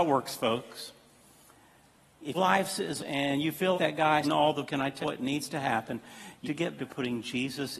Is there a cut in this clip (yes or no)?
yes